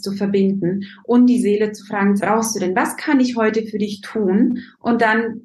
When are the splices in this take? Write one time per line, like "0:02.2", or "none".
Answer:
0:02.2